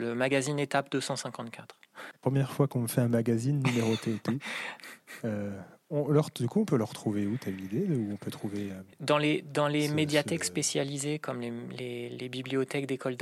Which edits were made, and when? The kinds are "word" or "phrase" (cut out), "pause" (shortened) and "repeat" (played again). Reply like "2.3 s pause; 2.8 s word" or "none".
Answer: 8.9 s pause